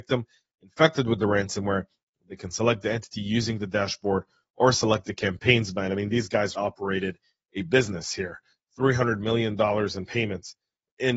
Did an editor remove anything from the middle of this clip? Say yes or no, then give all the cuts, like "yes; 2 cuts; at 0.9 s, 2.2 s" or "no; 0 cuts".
yes; 1 cut; at 6.5 s